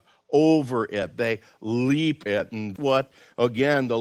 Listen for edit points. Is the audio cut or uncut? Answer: cut